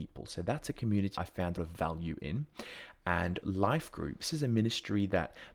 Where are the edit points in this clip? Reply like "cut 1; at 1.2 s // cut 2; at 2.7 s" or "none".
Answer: cut 1; at 1.2 s // cut 2; at 1.6 s // cut 3; at 3.4 s // cut 4; at 4.3 s